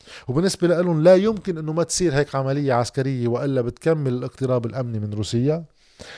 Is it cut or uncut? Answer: uncut